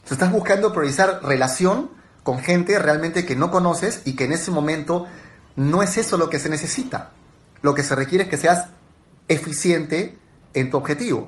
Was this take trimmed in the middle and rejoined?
no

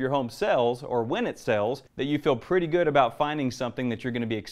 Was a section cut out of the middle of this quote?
yes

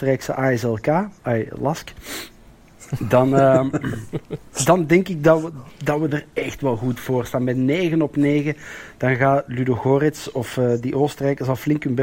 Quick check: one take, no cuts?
yes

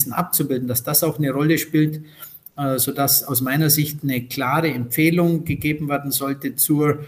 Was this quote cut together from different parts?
no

